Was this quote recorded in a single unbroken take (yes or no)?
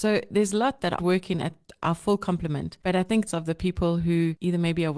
no